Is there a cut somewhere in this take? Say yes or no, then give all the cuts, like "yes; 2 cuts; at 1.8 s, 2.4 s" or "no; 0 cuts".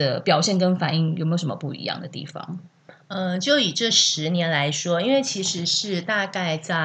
no; 0 cuts